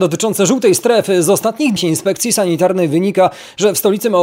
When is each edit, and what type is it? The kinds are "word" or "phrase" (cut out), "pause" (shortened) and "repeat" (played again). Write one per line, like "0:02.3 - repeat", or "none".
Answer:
0:01.8 - word